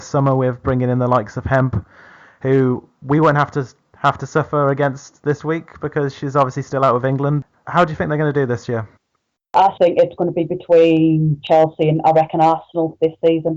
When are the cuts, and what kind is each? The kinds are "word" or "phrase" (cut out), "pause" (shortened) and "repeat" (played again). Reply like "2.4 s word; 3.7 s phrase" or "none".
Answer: 9.8 s word

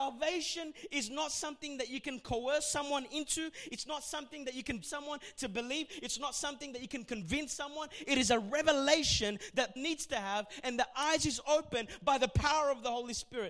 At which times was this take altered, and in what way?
4.8 s word; 9.8 s word

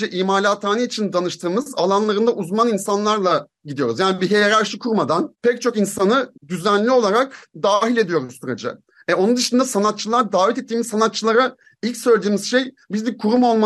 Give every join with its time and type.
6.4 s pause

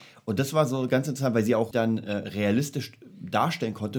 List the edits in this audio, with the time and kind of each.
1.7 s word

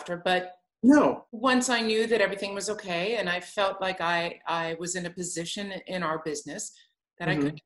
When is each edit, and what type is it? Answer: 1.3 s pause

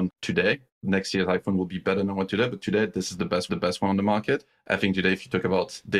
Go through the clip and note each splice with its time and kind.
3.5 s repeat

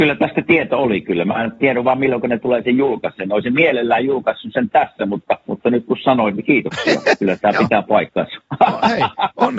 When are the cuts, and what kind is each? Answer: 5.4 s pause

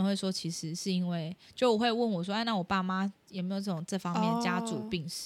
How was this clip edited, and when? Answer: none

